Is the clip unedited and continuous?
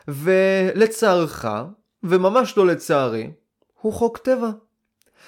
yes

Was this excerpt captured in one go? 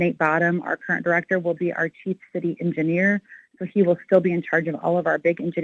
yes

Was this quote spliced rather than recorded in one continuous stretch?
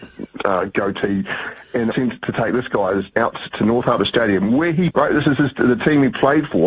yes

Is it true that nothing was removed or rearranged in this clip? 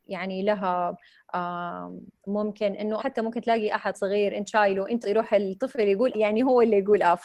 no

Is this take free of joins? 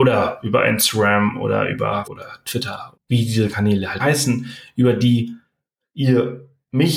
no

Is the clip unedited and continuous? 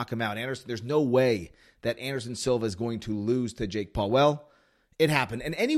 yes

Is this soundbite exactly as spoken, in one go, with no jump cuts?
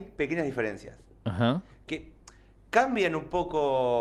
yes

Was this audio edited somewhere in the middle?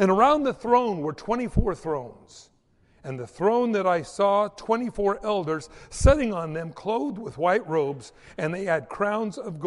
no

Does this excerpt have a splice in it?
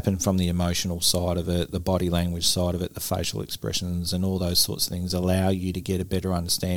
no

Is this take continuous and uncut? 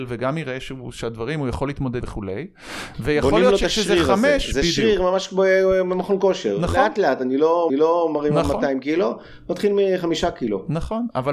no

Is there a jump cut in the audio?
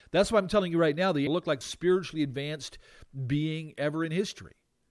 yes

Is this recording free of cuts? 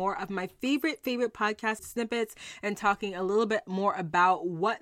no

